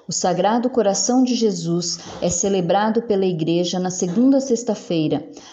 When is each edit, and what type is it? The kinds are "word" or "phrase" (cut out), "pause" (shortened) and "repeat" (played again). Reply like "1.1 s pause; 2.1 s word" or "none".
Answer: none